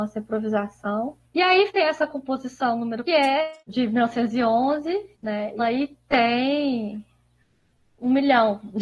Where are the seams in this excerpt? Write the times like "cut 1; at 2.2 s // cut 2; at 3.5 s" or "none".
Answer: cut 1; at 1.2 s // cut 2; at 1.7 s // cut 3; at 3.1 s // cut 4; at 3.6 s // cut 5; at 5.1 s // cut 6; at 5.6 s